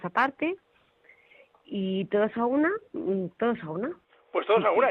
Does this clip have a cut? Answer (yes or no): yes